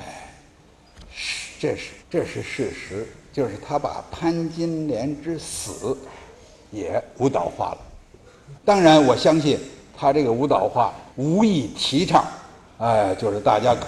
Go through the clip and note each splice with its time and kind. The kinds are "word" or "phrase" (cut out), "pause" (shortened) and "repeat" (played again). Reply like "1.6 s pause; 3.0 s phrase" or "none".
2.0 s pause; 8.5 s word; 11.1 s pause